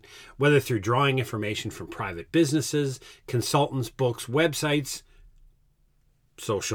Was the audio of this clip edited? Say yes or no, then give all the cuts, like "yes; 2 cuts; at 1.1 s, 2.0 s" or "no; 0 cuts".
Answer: no; 0 cuts